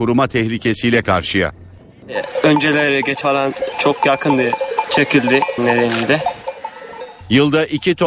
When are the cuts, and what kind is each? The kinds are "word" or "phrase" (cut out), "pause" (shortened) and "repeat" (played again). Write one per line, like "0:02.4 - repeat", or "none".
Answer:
0:01.0 - word
0:03.2 - word
0:03.7 - word
0:04.8 - word
0:05.6 - word